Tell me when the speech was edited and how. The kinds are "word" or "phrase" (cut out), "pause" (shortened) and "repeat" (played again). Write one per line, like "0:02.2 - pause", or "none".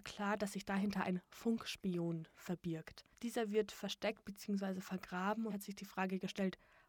0:03.1 - pause
0:05.5 - word